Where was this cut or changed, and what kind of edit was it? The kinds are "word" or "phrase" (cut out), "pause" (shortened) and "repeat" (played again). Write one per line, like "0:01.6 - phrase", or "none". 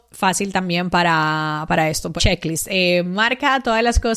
0:02.2 - phrase